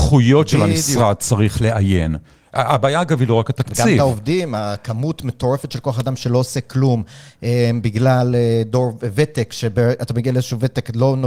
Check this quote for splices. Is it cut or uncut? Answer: uncut